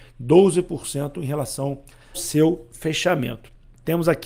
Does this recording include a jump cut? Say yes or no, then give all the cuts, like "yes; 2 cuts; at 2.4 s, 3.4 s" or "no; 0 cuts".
yes; 1 cut; at 2.1 s